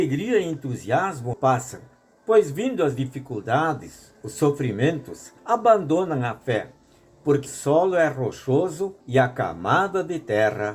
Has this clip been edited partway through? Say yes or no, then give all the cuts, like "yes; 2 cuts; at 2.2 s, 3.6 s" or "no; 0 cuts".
yes; 4 cuts; at 1.3 s, 5.4 s, 7.5 s, 9.0 s